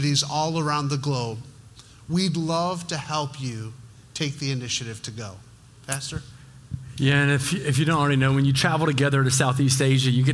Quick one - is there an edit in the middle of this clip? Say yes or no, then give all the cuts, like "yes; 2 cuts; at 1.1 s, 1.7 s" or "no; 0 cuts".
no; 0 cuts